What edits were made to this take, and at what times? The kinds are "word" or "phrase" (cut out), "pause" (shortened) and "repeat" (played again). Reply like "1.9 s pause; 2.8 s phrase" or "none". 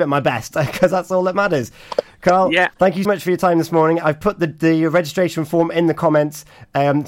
2.7 s pause; 3.0 s word